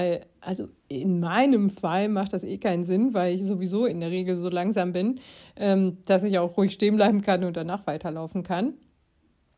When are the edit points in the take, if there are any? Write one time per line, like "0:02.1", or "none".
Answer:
none